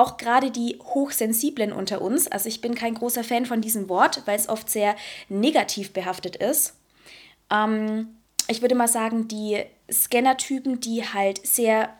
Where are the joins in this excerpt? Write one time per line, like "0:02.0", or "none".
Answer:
none